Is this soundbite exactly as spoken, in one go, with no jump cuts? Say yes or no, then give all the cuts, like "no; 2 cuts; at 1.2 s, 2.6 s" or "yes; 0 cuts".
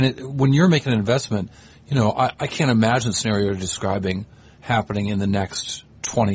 yes; 0 cuts